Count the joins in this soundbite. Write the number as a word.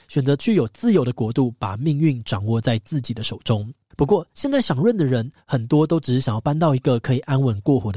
one